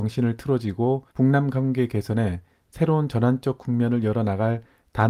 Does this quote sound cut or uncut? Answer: cut